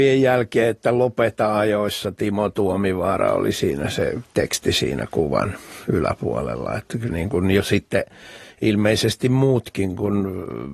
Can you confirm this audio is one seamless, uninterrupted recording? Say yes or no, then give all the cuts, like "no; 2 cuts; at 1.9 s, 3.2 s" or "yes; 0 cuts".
no; 1 cut; at 7.1 s